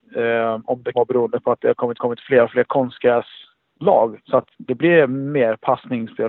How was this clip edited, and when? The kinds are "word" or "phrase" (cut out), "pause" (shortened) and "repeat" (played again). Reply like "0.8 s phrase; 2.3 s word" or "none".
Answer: 0.9 s word; 2.0 s repeat; 4.5 s pause